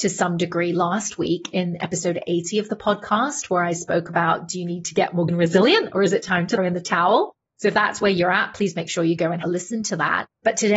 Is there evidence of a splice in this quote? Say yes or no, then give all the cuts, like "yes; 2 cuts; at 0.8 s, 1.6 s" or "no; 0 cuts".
yes; 3 cuts; at 5.3 s, 6.6 s, 9.4 s